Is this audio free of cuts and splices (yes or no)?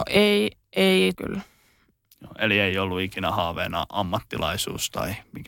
no